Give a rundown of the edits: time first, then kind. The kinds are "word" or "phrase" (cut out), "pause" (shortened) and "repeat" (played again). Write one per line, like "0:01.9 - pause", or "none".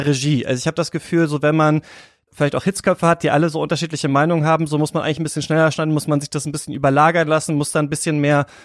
0:02.3 - word